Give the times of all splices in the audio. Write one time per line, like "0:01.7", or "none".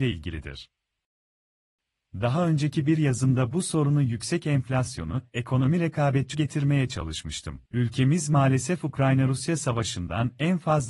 0:06.3
0:07.7